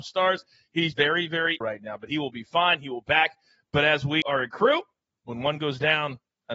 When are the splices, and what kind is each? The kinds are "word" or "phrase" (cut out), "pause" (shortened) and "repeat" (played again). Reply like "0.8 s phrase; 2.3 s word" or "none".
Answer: 0.9 s word; 1.6 s word; 3.0 s word; 4.2 s word